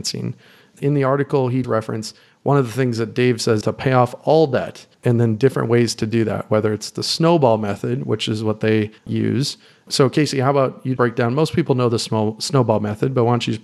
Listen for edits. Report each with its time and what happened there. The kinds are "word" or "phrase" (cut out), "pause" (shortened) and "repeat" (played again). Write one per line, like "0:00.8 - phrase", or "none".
0:01.6 - word
0:03.6 - word
0:04.9 - pause
0:09.0 - pause
0:11.0 - word